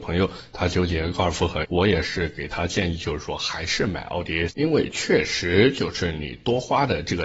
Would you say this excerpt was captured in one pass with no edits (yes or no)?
no